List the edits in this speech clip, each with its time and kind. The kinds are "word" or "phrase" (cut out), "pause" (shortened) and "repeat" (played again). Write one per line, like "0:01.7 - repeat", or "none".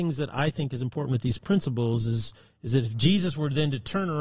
none